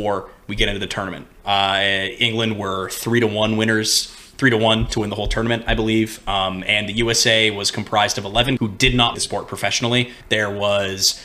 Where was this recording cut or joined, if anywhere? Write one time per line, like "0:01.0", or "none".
0:08.6
0:09.1
0:10.2